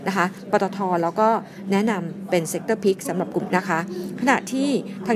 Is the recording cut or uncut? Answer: cut